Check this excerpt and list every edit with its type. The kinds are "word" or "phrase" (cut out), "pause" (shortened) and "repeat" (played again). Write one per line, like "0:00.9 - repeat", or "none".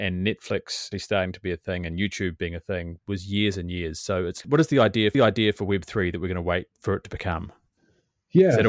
0:00.9 - word
0:03.0 - word
0:04.4 - word
0:05.1 - repeat
0:06.7 - pause